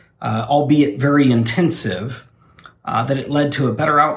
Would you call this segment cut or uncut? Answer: uncut